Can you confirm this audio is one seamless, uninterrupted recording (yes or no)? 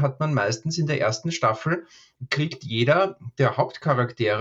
yes